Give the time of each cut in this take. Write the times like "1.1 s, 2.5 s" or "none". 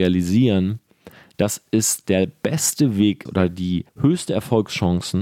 3.3 s, 3.9 s